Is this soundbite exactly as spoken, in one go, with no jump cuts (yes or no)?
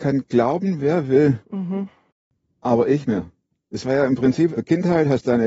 no